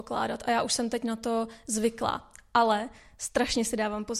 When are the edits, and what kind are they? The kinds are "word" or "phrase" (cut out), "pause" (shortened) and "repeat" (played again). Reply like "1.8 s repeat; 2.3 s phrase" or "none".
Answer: none